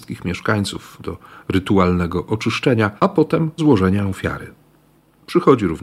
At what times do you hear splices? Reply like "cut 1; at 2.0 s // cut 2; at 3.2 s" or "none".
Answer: cut 1; at 1.0 s // cut 2; at 3.0 s // cut 3; at 3.6 s